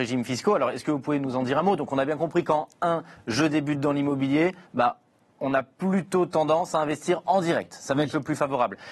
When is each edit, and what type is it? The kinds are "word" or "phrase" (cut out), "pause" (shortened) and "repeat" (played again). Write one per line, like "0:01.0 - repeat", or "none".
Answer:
0:04.7 - pause